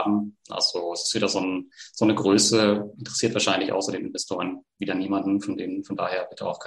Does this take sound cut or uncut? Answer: uncut